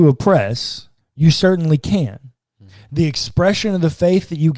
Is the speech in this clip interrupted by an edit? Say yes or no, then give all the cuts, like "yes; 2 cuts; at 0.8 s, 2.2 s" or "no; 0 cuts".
no; 0 cuts